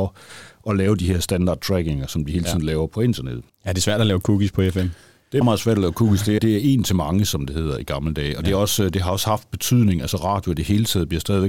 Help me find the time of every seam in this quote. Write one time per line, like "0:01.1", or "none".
0:03.5
0:05.4
0:06.4